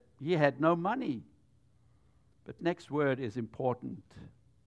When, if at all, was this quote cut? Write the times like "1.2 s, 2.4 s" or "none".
2.6 s